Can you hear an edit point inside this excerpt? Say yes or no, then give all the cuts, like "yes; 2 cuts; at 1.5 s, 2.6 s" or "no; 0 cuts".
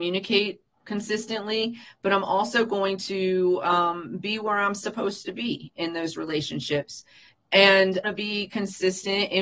yes; 1 cut; at 8.0 s